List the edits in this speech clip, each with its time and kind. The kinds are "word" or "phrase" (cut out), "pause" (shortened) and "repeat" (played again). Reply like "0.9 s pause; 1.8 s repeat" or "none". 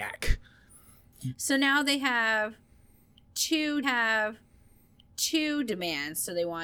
3.8 s repeat